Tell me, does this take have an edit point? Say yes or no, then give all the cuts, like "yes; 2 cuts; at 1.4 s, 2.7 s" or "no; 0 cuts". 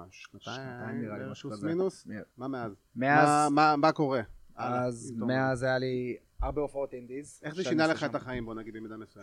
yes; 2 cuts; at 2.3 s, 2.9 s